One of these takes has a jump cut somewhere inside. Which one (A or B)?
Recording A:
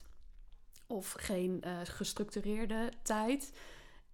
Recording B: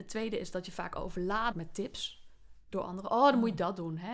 B